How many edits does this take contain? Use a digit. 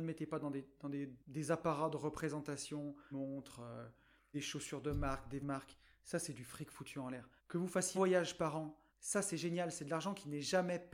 7